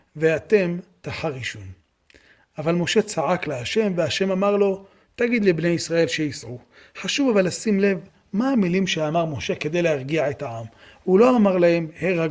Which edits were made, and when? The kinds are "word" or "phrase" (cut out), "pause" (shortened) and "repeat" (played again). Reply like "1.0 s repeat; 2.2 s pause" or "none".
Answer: none